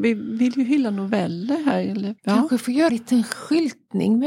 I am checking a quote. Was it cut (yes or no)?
yes